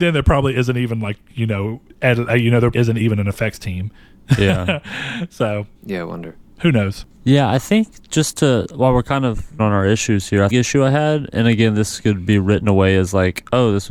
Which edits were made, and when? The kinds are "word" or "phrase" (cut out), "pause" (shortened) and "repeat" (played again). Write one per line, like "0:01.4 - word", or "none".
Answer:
0:01.9 - pause
0:02.7 - word
0:05.8 - pause
0:09.6 - word
0:10.5 - phrase